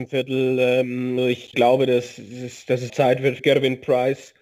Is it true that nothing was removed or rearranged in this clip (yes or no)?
no